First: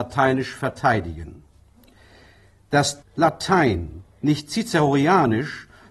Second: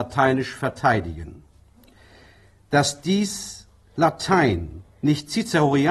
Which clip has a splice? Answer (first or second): first